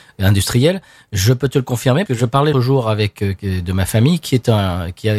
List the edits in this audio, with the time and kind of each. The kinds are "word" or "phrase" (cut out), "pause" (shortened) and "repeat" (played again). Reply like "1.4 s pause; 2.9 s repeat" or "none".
2.1 s word; 2.5 s word; 3.4 s word